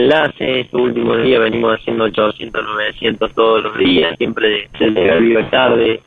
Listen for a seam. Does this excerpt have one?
yes; 1 cut; at 4.1 s

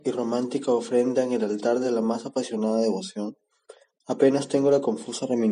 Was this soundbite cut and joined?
no; 0 cuts

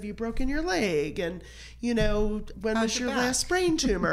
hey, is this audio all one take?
no; 1 cut; at 2.5 s

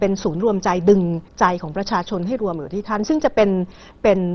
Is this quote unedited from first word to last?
no; 1 cut; at 1.3 s

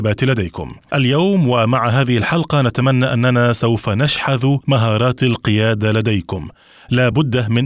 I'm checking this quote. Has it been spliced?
no; 0 cuts

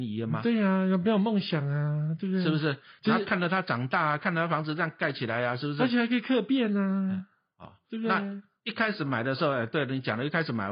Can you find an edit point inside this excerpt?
no; 0 cuts

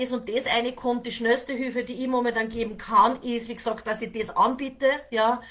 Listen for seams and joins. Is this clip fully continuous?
yes; 0 cuts

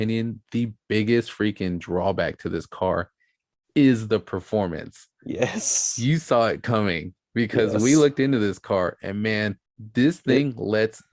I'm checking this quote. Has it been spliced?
yes; 1 cut; at 9.7 s

